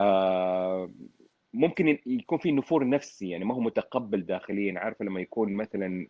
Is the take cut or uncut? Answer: uncut